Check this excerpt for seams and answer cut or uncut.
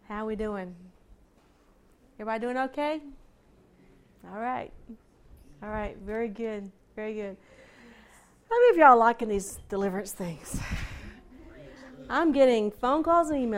uncut